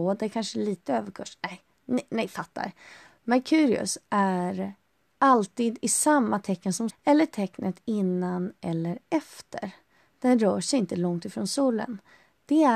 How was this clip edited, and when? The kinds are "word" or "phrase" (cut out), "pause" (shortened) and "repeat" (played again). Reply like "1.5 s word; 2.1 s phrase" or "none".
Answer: 6.9 s word